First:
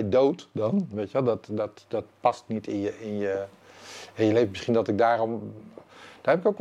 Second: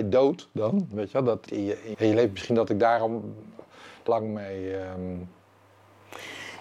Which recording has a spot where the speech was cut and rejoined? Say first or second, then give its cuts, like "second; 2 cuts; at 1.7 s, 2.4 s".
second; 3 cuts; at 1.5 s, 1.9 s, 4.1 s